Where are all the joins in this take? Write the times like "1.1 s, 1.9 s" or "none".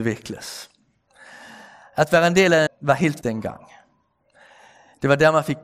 2.7 s, 3.2 s